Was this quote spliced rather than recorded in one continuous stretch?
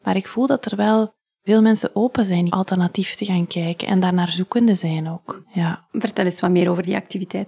yes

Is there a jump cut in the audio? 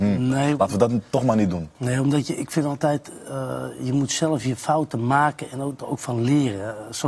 no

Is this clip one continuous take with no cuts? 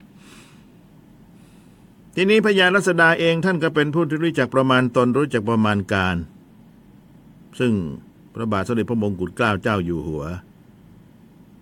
yes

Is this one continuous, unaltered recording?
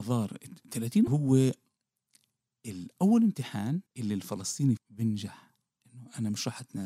no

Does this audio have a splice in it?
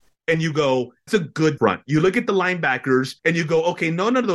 yes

